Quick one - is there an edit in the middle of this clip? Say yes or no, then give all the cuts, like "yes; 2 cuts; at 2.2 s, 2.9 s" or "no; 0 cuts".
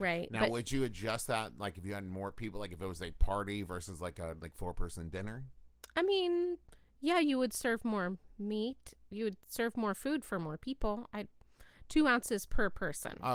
no; 0 cuts